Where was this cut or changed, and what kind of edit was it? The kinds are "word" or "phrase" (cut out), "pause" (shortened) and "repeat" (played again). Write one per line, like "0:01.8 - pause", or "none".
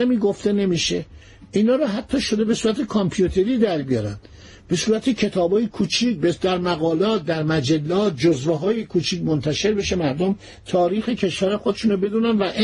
none